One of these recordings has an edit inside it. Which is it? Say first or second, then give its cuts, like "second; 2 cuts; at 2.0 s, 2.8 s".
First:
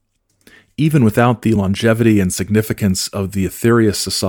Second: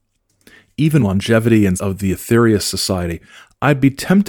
second; 2 cuts; at 1.0 s, 1.8 s